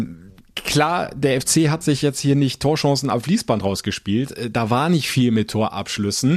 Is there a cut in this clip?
no; 0 cuts

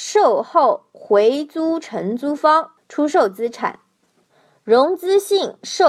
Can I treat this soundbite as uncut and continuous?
yes; 0 cuts

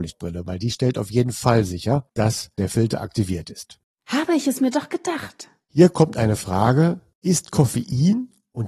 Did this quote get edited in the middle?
no; 0 cuts

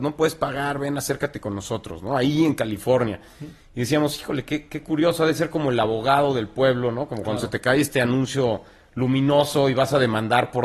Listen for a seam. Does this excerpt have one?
no; 0 cuts

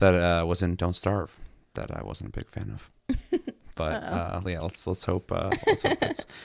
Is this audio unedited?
yes; 0 cuts

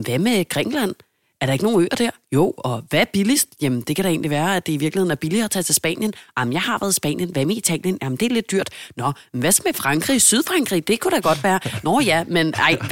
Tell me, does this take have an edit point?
no; 0 cuts

